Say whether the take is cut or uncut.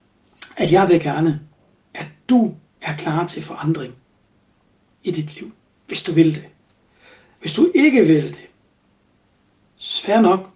uncut